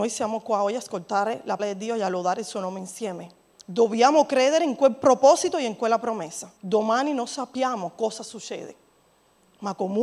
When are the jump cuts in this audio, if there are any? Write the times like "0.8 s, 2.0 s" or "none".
1.6 s, 3.5 s, 6.6 s